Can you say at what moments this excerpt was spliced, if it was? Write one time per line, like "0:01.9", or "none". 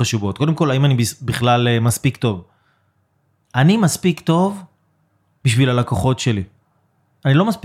none